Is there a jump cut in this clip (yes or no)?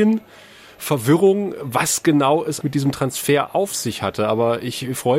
yes